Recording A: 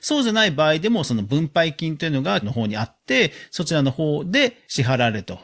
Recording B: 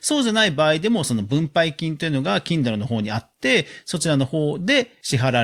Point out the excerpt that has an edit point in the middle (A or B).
A